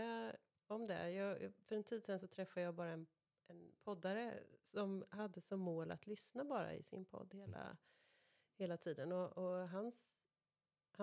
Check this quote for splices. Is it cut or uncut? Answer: uncut